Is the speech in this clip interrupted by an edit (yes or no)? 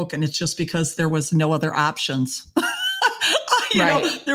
no